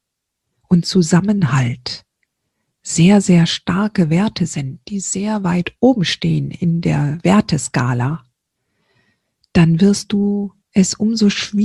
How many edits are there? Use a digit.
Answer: 0